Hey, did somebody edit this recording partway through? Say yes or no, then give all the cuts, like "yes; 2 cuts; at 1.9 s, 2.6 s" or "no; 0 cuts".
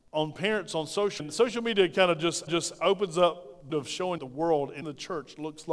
yes; 5 cuts; at 1.2 s, 2.5 s, 3.7 s, 4.2 s, 4.8 s